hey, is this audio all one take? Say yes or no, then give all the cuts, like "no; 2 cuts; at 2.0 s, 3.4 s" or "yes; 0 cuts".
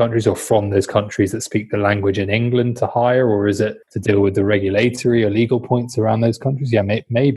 no; 1 cut; at 3.8 s